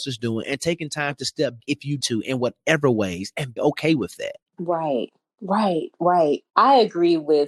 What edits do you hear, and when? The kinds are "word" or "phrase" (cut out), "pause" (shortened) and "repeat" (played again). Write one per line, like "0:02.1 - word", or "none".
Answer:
0:01.6 - word
0:02.0 - word
0:03.6 - word
0:04.5 - pause
0:06.5 - pause